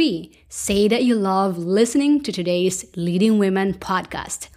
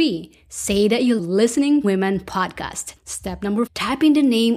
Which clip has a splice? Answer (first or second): second